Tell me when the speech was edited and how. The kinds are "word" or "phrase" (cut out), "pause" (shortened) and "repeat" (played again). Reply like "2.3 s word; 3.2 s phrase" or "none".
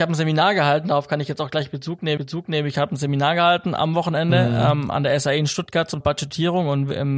2.2 s repeat; 4.9 s word; 6.0 s word

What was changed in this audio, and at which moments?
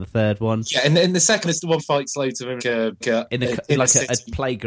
1.4 s word; 1.8 s word; 2.6 s word; 3.0 s word

